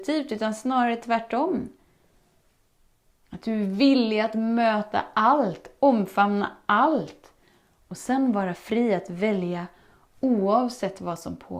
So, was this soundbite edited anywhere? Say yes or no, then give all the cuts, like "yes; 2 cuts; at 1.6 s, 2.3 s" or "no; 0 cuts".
no; 0 cuts